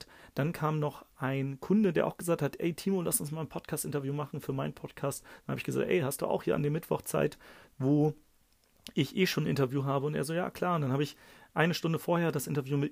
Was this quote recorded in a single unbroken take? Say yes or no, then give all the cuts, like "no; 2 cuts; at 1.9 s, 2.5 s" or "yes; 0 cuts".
yes; 0 cuts